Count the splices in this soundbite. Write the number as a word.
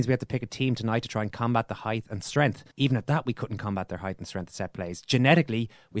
one